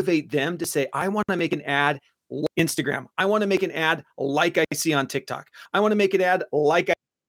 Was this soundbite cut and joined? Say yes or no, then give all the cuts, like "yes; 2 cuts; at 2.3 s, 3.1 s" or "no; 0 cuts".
yes; 1 cut; at 2.5 s